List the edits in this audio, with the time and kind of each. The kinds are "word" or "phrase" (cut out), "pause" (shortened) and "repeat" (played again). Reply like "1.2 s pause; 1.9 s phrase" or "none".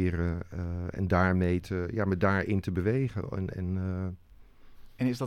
none